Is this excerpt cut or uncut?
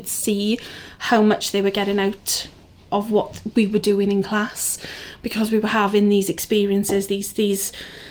uncut